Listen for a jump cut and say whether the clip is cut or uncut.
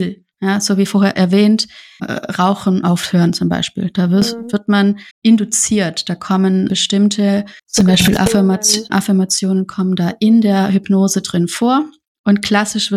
cut